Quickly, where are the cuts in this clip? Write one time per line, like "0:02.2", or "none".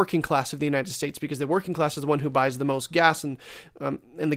none